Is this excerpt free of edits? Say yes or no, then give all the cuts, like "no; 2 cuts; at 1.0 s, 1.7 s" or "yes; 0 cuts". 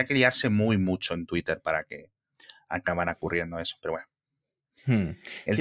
yes; 0 cuts